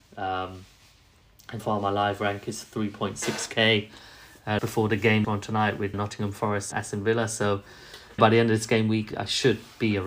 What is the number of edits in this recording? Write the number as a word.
seven